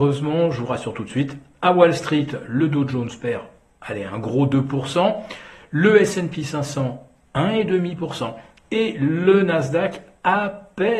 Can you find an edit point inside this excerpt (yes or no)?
no